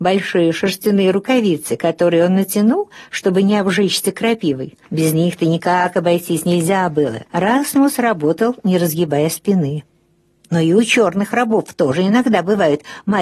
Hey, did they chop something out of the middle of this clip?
yes; 2 cuts; at 4.8 s, 7.3 s

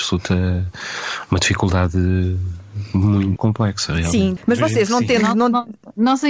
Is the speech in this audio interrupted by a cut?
yes; 1 cut; at 3.4 s

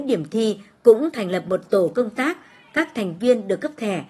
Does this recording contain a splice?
no; 0 cuts

